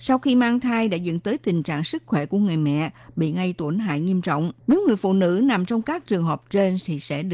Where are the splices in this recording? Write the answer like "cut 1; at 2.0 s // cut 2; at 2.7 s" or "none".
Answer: cut 1; at 4.6 s